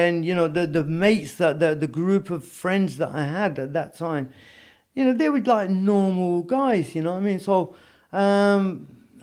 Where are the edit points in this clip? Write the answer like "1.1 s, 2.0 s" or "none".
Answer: none